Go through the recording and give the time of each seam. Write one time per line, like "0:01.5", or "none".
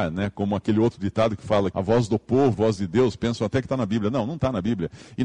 0:01.7
0:02.5